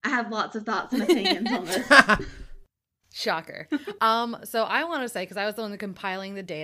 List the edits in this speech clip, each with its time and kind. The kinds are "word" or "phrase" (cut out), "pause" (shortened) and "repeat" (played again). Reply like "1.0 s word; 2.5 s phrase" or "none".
none